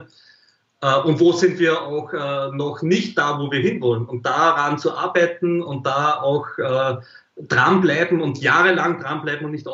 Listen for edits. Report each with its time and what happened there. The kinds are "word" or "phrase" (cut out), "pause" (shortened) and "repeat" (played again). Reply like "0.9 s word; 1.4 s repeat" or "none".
none